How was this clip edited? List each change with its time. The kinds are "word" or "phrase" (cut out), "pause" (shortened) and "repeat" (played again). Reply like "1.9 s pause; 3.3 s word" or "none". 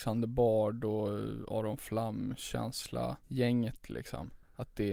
3.2 s pause